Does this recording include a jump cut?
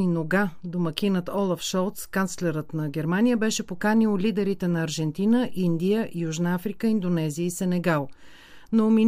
no; 0 cuts

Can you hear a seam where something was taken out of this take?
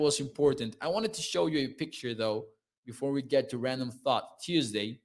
no; 0 cuts

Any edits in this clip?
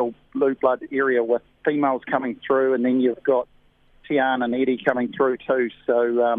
no; 0 cuts

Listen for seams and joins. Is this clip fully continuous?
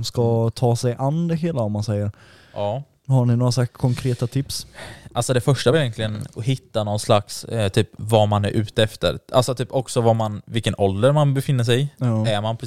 yes; 0 cuts

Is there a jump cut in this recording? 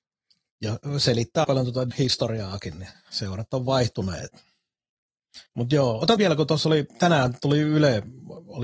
yes; 4 cuts; at 1.4 s, 1.9 s, 5.5 s, 6.2 s

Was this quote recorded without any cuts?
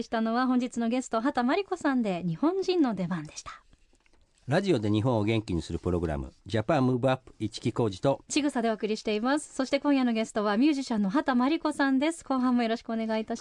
yes; 0 cuts

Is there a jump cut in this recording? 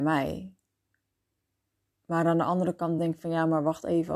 no; 0 cuts

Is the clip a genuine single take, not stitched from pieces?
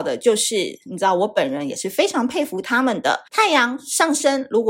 no; 1 cut; at 3.3 s

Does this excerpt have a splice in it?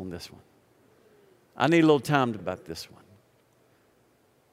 yes; 1 cut; at 2.4 s

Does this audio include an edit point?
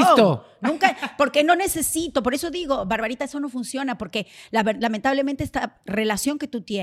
no; 0 cuts

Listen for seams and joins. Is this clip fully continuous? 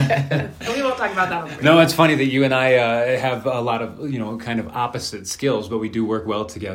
yes; 0 cuts

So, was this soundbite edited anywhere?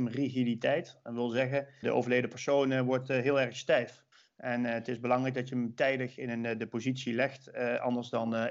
yes; 2 cuts; at 1.8 s, 4.1 s

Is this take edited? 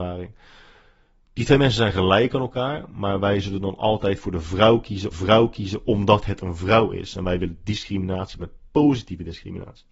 yes; 2 cuts; at 5.1 s, 8.4 s

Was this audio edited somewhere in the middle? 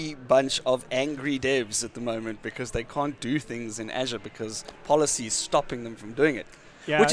no; 0 cuts

